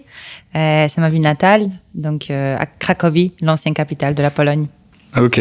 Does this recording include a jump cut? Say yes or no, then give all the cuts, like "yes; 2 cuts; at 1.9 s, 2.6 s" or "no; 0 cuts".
no; 0 cuts